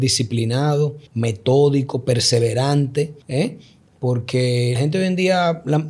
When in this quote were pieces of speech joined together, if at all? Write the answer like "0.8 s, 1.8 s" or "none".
1.1 s, 3.2 s, 4.8 s